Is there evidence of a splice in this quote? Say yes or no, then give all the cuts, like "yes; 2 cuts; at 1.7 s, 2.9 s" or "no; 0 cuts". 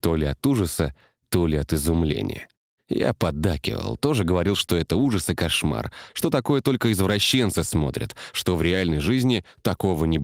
no; 0 cuts